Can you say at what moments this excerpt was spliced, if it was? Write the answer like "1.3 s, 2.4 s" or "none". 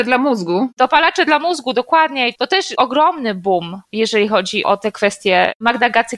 none